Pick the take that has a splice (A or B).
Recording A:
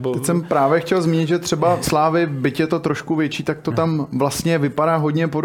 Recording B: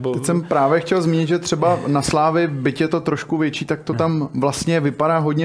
A